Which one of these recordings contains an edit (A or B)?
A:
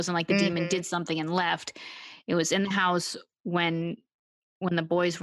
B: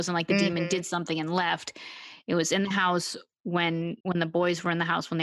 B